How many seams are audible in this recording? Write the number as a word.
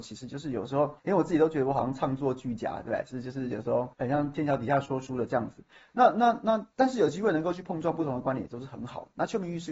three